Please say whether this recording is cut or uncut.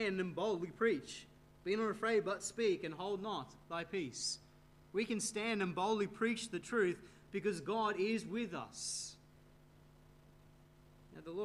uncut